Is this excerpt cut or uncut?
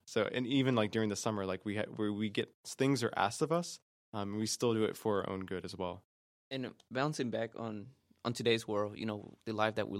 uncut